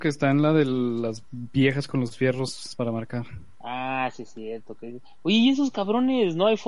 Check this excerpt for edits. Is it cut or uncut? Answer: uncut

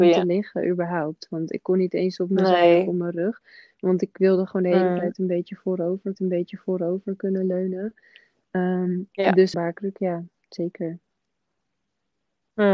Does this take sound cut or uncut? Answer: cut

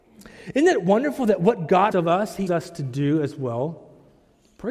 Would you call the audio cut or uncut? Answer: cut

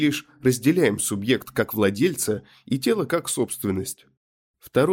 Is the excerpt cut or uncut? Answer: uncut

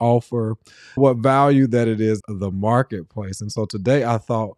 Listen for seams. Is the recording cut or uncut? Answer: cut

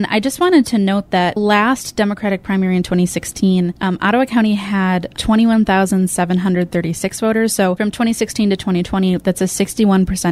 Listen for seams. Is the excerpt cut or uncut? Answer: cut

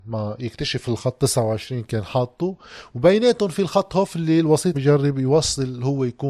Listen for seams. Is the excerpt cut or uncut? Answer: cut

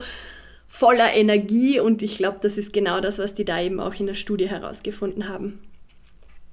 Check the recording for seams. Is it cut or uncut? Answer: uncut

